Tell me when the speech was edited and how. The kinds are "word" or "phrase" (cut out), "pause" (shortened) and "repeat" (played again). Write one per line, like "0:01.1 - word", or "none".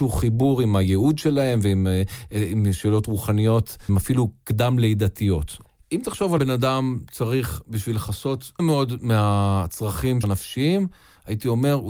0:03.9 - word
0:06.4 - word
0:08.6 - word
0:10.2 - word